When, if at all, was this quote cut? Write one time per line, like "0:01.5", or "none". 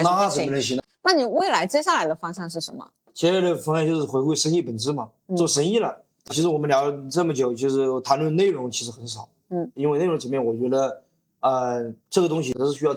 0:03.0
0:06.3
0:12.0